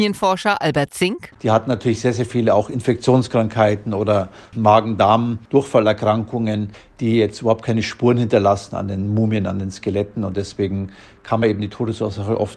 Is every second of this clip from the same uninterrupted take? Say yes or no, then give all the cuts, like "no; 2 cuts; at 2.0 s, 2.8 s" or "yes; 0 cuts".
yes; 0 cuts